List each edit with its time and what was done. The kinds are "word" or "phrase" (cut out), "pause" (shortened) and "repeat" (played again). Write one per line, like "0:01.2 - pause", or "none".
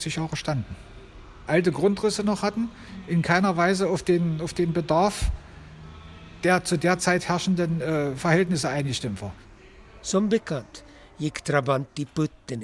none